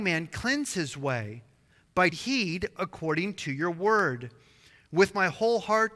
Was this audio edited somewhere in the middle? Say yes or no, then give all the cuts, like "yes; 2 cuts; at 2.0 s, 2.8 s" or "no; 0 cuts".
yes; 1 cut; at 2.1 s